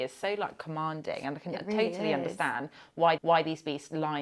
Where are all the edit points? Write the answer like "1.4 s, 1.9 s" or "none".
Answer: 3.2 s